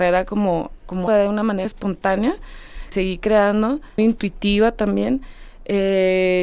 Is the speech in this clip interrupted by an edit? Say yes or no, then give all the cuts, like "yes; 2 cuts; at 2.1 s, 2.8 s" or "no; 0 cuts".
yes; 4 cuts; at 1.1 s, 1.6 s, 2.9 s, 4.0 s